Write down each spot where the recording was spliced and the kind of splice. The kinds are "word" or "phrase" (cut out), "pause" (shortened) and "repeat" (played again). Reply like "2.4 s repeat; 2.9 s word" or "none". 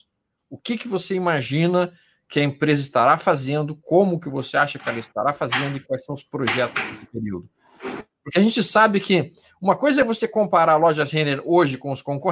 none